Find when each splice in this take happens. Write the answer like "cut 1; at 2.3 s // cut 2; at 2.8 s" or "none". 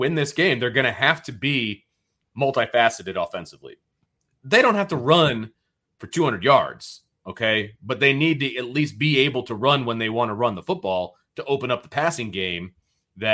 none